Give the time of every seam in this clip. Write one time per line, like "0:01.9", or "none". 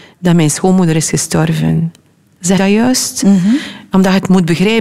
0:02.6

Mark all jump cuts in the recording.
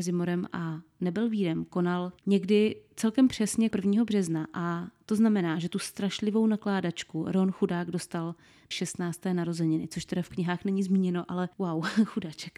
0:02.2
0:03.7
0:08.7

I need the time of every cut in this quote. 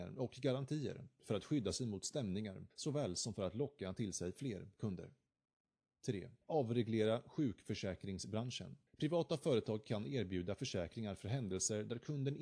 0:02.7
0:06.4
0:08.9

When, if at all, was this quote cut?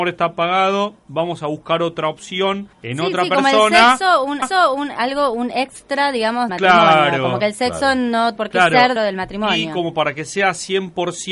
0:02.7
0:04.4
0:06.5
0:08.4
0:09.0

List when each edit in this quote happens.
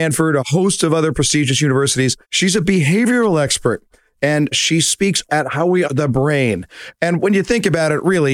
0:02.2
0:04.5
0:05.3
0:05.8

